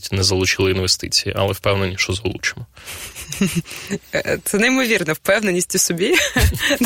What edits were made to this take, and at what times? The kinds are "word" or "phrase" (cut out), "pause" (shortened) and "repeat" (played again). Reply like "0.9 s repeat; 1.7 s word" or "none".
none